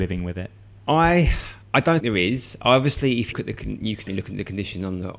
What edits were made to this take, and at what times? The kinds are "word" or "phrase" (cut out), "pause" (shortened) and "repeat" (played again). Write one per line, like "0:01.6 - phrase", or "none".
0:01.6 - pause
0:02.0 - word
0:03.3 - word
0:04.1 - word